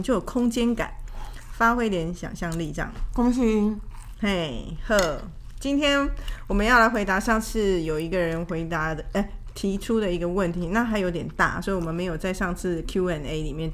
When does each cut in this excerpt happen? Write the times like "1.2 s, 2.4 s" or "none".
none

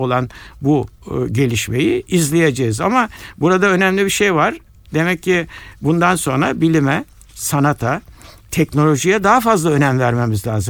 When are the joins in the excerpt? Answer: none

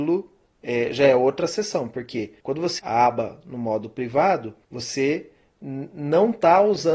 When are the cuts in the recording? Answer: 2.4 s, 2.8 s, 4.6 s

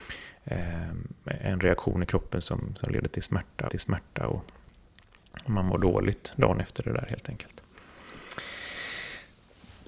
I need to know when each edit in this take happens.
3.7 s

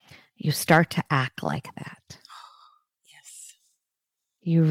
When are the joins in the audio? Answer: none

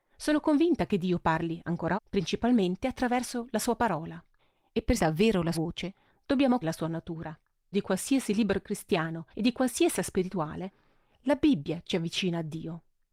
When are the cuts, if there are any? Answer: 1.9 s, 4.4 s, 5.0 s, 5.5 s, 6.6 s, 7.7 s, 9.3 s, 10.0 s

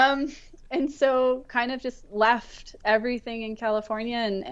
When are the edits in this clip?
none

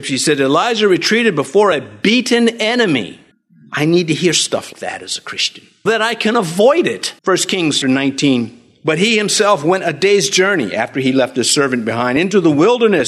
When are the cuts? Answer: 3.3 s, 4.7 s, 5.9 s, 7.2 s, 7.8 s

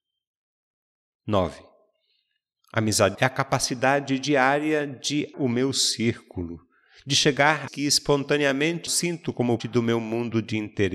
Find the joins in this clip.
3.1 s, 5.3 s, 7.7 s, 8.9 s, 9.6 s

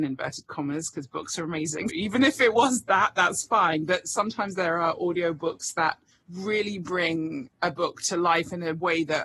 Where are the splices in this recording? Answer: 1.9 s, 6.1 s, 7.5 s

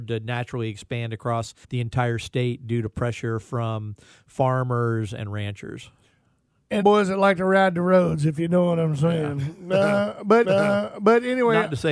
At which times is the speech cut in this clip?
1.6 s, 6.8 s, 10.4 s

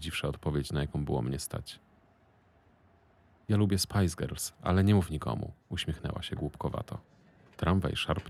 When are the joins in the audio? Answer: none

